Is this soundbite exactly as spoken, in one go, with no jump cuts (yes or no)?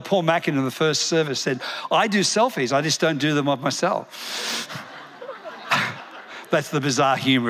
yes